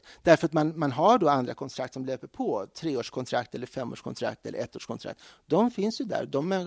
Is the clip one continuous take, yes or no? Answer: yes